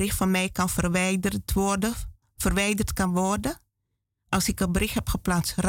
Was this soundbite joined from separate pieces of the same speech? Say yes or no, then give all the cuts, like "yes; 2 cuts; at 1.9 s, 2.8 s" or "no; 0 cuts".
no; 0 cuts